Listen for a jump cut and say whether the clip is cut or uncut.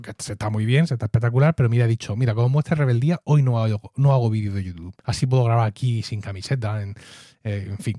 cut